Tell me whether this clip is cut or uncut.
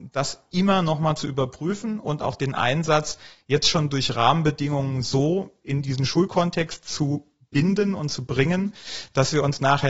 uncut